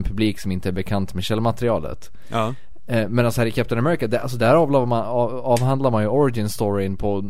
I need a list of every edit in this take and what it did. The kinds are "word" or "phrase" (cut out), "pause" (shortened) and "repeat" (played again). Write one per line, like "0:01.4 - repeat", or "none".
none